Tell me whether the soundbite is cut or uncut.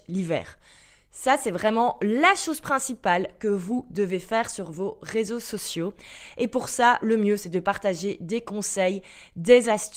cut